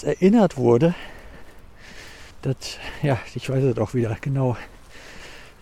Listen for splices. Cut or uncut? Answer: cut